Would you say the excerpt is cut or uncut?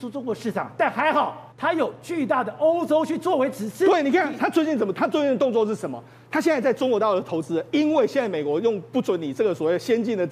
cut